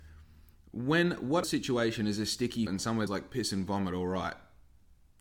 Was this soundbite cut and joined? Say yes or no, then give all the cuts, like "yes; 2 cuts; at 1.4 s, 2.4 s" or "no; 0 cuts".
yes; 3 cuts; at 1.4 s, 2.7 s, 3.1 s